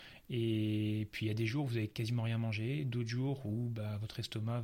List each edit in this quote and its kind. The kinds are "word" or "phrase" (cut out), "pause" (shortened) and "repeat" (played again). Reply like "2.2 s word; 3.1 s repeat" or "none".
none